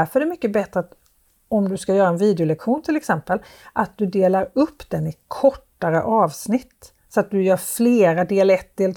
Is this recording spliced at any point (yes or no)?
yes